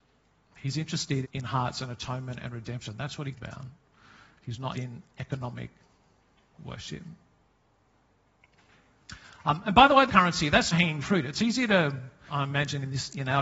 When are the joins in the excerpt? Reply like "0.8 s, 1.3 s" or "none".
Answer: 1.2 s, 3.3 s, 4.7 s, 10.1 s, 10.7 s, 12.3 s